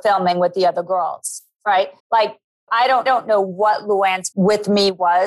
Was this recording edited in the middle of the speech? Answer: yes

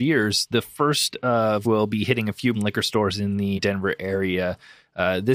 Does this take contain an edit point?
yes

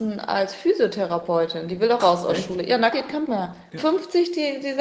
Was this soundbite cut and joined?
yes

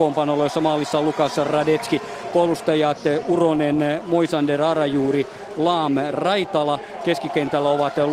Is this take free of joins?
yes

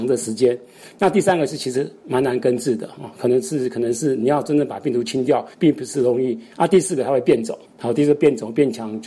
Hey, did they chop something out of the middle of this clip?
yes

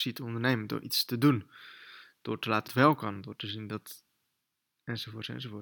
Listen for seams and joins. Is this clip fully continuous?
no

